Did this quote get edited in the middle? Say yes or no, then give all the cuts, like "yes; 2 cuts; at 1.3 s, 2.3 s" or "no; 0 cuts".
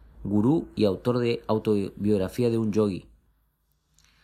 no; 0 cuts